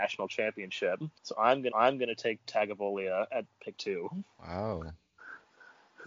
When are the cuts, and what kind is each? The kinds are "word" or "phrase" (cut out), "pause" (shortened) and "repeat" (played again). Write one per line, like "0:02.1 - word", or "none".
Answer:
0:01.2 - pause
0:01.7 - repeat
0:02.4 - word
0:03.8 - word